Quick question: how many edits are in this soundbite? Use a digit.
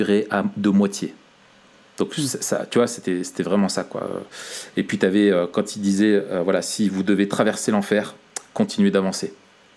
0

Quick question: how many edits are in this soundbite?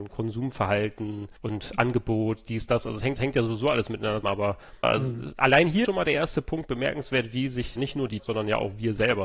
7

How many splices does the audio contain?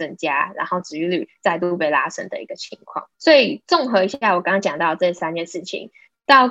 1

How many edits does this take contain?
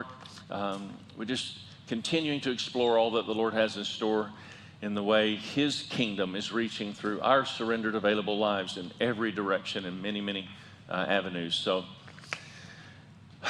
0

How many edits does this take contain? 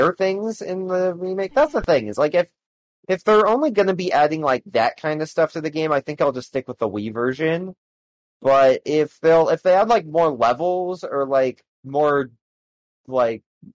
1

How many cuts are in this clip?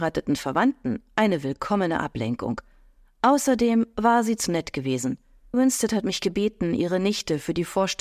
2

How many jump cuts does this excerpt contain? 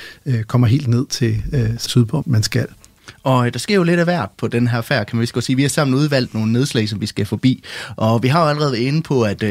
2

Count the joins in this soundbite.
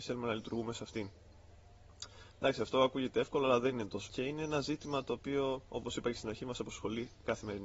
1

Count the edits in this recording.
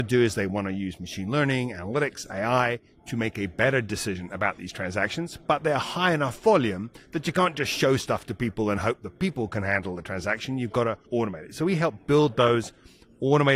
1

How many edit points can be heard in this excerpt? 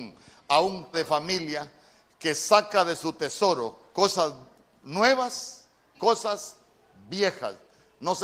2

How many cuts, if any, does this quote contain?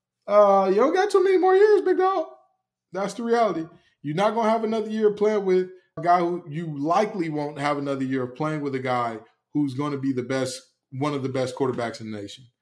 1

